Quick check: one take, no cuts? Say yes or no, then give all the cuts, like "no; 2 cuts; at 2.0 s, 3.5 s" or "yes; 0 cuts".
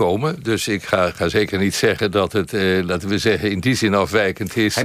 yes; 0 cuts